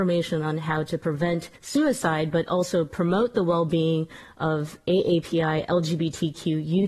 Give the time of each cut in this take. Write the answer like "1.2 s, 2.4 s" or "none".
1.6 s